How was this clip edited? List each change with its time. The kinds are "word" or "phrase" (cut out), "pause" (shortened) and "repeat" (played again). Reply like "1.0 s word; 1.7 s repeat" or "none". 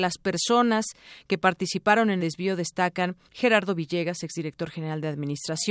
2.2 s word; 3.3 s pause